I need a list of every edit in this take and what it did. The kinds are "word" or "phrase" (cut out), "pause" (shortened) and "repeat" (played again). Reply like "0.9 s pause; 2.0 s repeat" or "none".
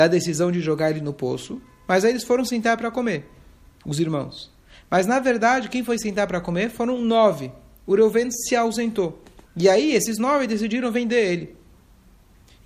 9.4 s pause